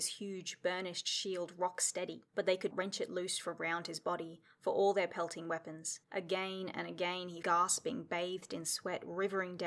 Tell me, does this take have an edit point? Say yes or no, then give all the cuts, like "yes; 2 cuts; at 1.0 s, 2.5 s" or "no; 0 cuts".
yes; 4 cuts; at 2.3 s, 2.7 s, 6.0 s, 7.4 s